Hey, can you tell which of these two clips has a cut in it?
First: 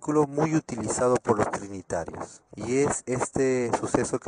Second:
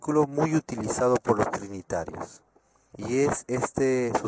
first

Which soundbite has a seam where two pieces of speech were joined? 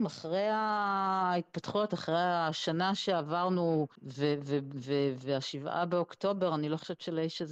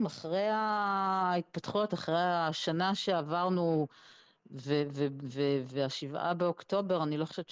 first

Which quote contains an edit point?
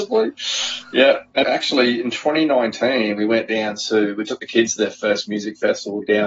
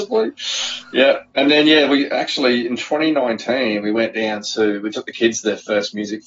first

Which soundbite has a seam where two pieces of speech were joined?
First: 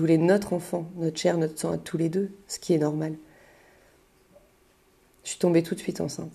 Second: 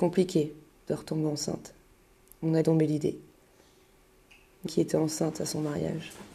second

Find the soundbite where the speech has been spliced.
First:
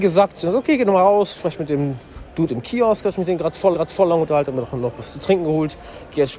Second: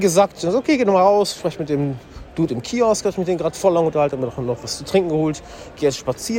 first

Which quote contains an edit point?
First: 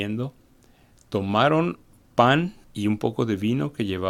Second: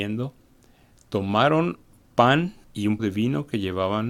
second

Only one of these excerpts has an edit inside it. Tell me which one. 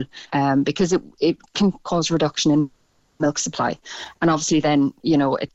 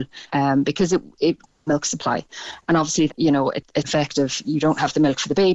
second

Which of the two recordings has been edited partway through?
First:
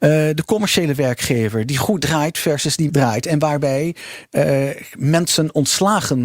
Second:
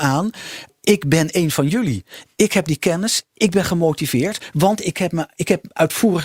first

